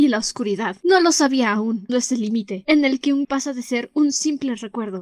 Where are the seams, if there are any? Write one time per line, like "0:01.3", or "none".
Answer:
0:01.9
0:03.2